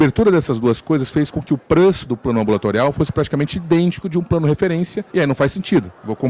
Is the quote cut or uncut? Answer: cut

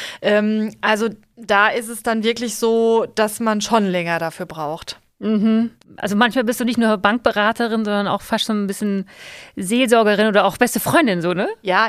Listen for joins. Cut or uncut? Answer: uncut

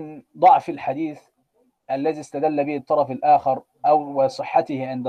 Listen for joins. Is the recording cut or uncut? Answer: uncut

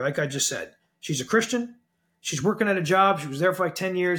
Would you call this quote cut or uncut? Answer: uncut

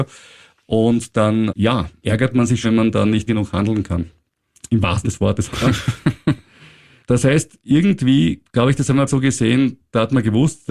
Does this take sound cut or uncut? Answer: cut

